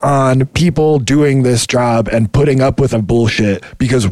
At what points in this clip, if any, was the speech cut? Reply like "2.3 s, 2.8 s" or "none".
2.9 s